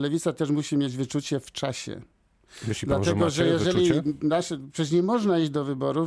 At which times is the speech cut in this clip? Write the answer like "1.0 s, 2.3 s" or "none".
none